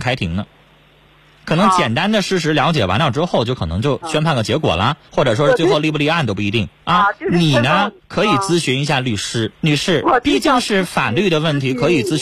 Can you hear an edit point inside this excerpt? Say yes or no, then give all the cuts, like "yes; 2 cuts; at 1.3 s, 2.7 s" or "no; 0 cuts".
yes; 4 cuts; at 5.0 s, 6.7 s, 8.0 s, 9.5 s